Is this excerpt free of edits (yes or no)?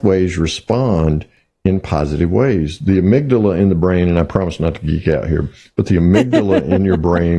yes